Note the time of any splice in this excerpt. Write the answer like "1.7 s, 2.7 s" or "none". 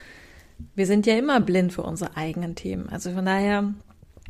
none